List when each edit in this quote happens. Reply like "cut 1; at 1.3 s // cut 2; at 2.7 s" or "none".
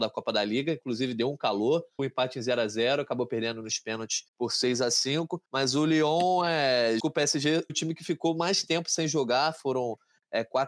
cut 1; at 2.0 s // cut 2; at 4.3 s // cut 3; at 5.5 s // cut 4; at 7.0 s // cut 5; at 7.7 s